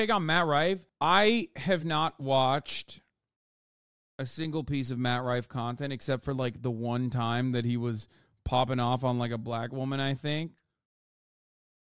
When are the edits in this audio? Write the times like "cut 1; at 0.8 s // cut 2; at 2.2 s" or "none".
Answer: none